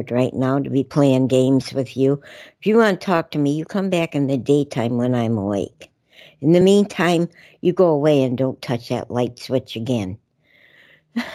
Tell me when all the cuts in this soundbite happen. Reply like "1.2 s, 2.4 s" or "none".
none